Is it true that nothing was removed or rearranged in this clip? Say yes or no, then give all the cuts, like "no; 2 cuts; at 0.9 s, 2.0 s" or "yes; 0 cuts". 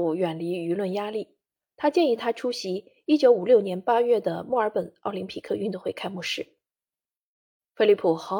yes; 0 cuts